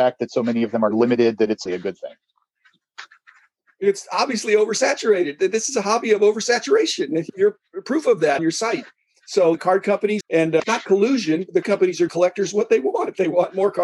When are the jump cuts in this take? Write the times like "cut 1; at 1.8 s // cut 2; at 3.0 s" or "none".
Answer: cut 1; at 1.7 s // cut 2; at 8.4 s // cut 3; at 9.6 s // cut 4; at 10.2 s // cut 5; at 10.6 s // cut 6; at 11.6 s // cut 7; at 12.1 s